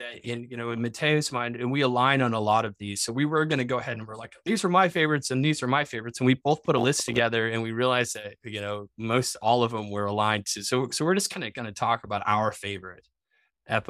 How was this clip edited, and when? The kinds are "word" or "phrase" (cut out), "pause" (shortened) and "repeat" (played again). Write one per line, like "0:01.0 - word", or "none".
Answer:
none